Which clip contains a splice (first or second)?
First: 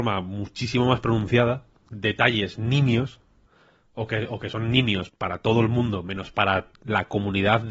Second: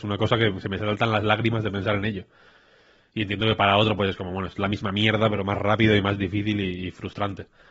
first